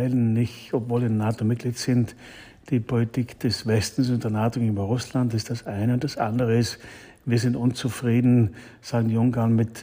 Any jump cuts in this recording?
no; 0 cuts

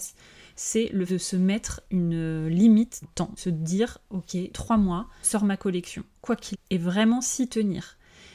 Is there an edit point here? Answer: yes; 6 cuts; at 1.1 s, 3.0 s, 3.4 s, 4.5 s, 5.2 s, 6.5 s

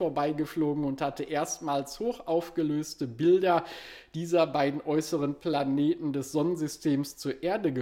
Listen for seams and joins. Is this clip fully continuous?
yes; 0 cuts

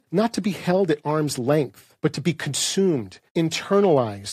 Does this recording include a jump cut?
yes; 2 cuts; at 2.0 s, 3.3 s

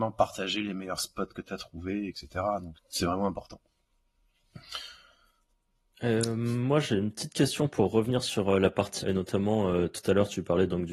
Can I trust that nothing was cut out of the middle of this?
no; 2 cuts; at 2.7 s, 9.0 s

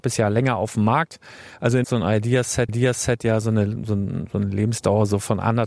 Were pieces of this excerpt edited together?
yes; 2 cuts; at 1.8 s, 2.7 s

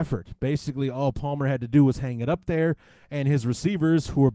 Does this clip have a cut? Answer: no; 0 cuts

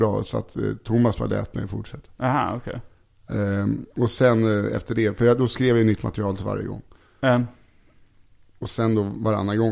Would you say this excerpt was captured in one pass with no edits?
yes; 0 cuts

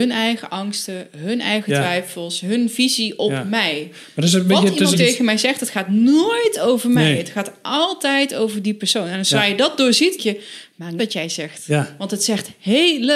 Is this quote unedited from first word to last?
no; 3 cuts; at 4.9 s, 10.2 s, 11.0 s

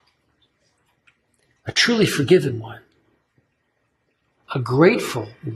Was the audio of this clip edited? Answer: no; 0 cuts

